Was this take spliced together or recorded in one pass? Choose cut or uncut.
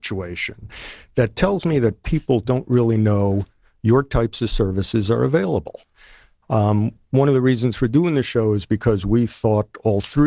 uncut